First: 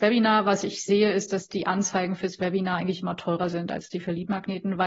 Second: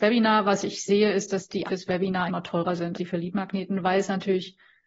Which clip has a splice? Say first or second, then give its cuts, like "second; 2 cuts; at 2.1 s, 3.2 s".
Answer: second; 3 cuts; at 1.6 s, 2.3 s, 2.9 s